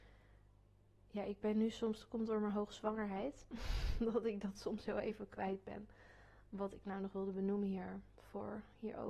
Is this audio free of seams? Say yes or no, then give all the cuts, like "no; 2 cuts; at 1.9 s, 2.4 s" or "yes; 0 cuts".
yes; 0 cuts